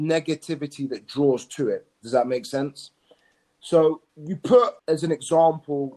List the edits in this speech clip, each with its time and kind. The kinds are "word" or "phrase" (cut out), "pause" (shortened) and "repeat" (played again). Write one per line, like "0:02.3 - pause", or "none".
0:01.9 - pause
0:04.1 - pause
0:04.8 - pause